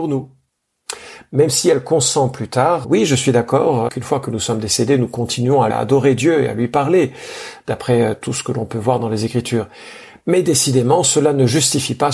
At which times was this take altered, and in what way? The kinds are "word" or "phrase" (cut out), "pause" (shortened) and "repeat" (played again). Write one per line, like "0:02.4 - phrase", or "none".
0:02.8 - word
0:03.9 - word
0:05.7 - word

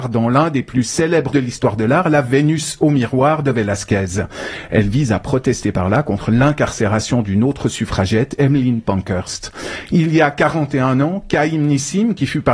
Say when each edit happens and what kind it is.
0:01.3 - word

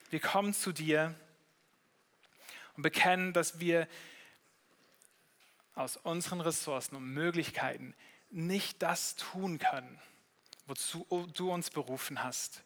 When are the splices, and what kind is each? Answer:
none

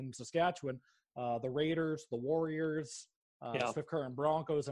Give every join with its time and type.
none

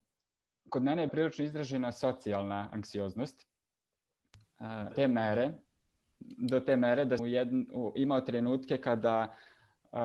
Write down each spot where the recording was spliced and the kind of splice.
0:01.1 - word
0:04.9 - word
0:07.2 - word

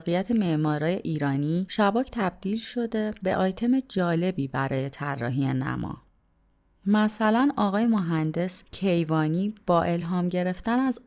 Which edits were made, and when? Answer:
none

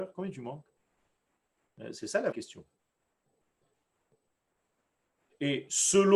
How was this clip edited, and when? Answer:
0:02.3 - word

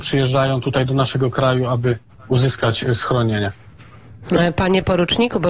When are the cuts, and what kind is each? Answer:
none

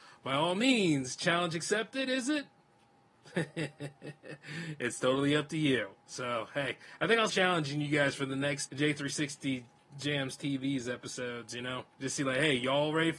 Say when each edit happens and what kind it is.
0:07.3 - word
0:08.7 - word
0:11.9 - pause

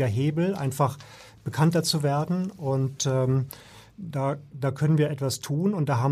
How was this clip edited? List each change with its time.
none

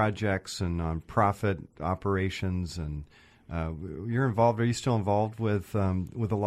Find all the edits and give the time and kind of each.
none

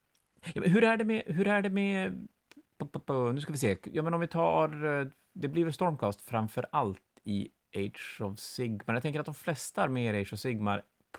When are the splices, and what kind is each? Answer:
none

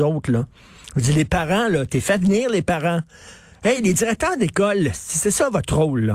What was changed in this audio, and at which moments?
none

